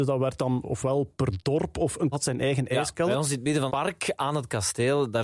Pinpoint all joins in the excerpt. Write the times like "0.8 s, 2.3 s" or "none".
2.1 s, 3.7 s